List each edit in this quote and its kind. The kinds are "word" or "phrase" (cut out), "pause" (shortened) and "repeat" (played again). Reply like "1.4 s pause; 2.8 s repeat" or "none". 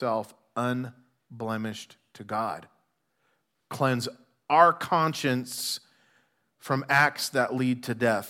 none